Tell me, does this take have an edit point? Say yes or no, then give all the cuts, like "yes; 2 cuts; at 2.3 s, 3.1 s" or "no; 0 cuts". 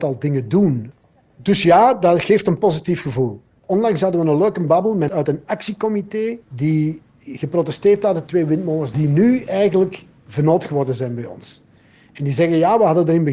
yes; 5 cuts; at 1.0 s, 5.1 s, 6.4 s, 8.3 s, 8.9 s